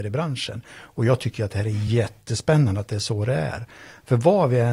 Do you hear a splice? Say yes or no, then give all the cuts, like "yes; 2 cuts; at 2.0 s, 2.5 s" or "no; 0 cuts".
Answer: no; 0 cuts